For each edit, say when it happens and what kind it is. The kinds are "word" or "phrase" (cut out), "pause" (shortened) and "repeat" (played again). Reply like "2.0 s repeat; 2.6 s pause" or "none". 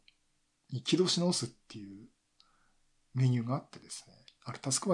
none